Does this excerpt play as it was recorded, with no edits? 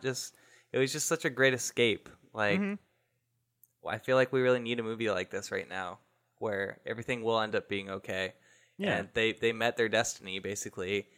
yes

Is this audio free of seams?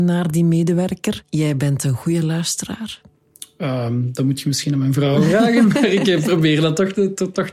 yes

